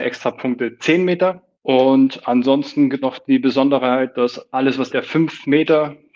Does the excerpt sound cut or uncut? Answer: cut